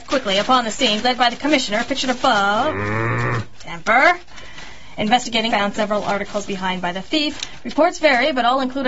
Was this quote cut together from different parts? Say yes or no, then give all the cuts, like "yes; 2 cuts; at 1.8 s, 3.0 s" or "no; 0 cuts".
yes; 3 cuts; at 1.0 s, 5.5 s, 6.5 s